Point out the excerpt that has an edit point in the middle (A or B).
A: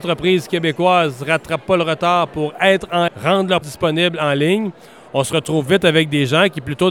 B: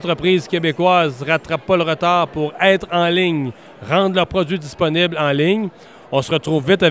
A